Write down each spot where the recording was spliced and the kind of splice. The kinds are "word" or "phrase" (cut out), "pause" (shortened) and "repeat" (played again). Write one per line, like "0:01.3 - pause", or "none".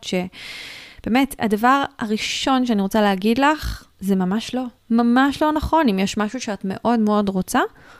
0:03.9 - pause
0:04.8 - pause